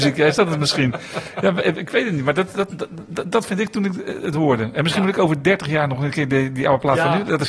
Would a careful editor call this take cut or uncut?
uncut